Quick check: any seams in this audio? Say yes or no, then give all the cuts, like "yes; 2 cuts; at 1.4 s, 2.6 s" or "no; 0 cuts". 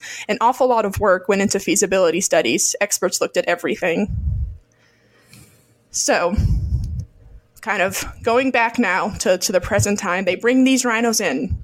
no; 0 cuts